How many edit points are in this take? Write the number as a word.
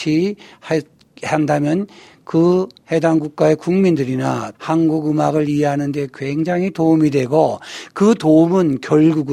one